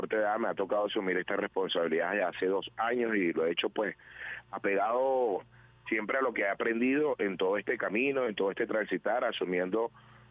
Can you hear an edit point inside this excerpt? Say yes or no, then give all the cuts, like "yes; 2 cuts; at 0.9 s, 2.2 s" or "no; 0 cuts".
no; 0 cuts